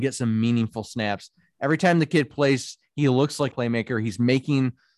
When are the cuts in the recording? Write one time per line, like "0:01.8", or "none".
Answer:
0:03.5